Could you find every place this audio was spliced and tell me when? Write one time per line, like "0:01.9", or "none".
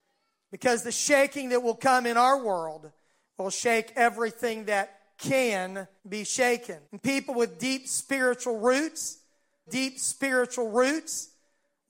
0:06.0
0:06.8
0:09.7